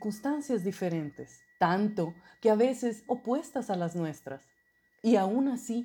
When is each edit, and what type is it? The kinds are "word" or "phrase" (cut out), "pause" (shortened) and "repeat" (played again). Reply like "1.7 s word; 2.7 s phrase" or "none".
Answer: 1.5 s pause; 3.1 s word